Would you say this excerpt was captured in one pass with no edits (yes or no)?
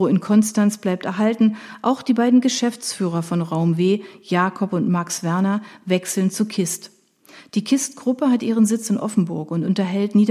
yes